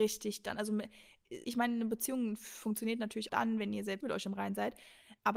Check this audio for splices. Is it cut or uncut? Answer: cut